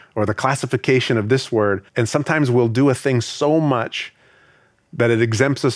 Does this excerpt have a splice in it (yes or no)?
yes